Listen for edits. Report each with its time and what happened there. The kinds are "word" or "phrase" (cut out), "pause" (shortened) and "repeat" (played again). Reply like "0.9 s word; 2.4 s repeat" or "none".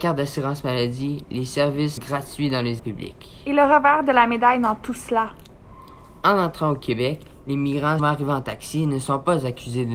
2.0 s word; 2.8 s word; 8.0 s word